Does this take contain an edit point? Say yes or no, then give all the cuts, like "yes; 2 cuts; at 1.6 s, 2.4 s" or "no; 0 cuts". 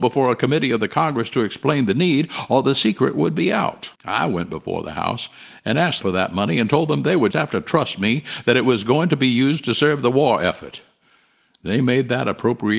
yes; 3 cuts; at 3.9 s, 6.0 s, 7.3 s